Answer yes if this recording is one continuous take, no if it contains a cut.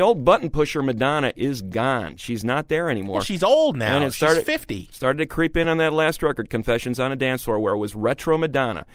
yes